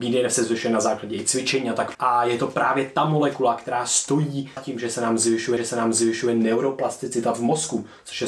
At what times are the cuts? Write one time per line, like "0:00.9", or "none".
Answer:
0:01.9
0:04.6
0:05.6